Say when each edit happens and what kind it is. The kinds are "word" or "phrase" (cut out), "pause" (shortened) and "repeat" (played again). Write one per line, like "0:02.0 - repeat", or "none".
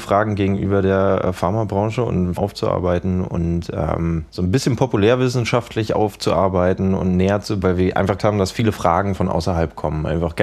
0:02.4 - phrase
0:04.3 - pause
0:07.6 - phrase
0:08.2 - word

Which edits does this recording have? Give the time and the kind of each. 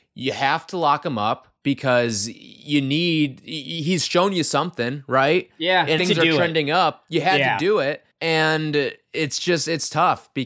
0:01.6 - pause
0:06.0 - phrase
0:08.1 - pause

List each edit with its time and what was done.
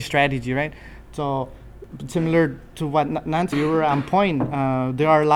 0:03.5 - word

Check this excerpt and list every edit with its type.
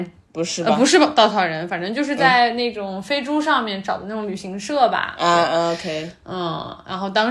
none

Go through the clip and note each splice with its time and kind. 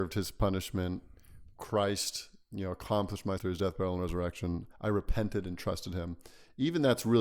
0:03.4 - word
0:04.7 - pause

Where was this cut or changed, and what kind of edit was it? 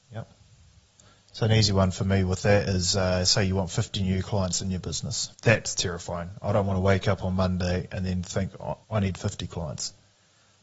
0:05.3 - pause
0:08.8 - pause

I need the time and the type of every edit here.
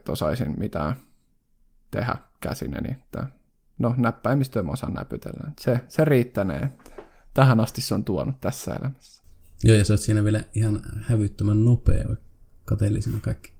none

